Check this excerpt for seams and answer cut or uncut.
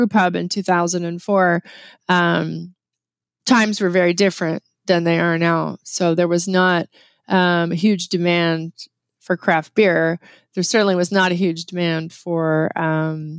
uncut